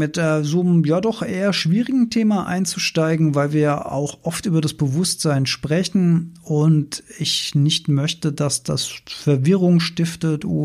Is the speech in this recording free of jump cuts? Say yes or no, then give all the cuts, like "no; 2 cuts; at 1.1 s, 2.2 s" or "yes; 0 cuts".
yes; 0 cuts